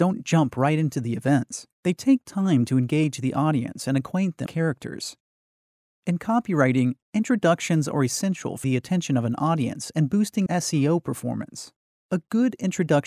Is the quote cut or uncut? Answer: cut